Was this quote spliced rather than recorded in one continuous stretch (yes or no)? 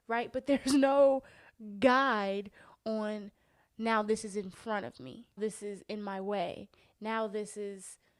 yes